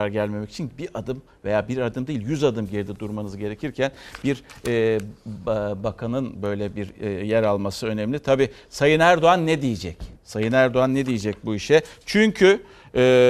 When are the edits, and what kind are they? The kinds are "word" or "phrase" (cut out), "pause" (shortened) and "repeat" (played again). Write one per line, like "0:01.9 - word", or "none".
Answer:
0:10.2 - pause